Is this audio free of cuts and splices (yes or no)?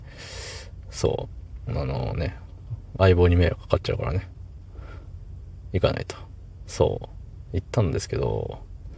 yes